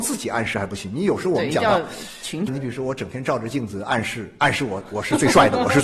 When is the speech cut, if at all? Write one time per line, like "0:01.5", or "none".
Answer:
0:02.5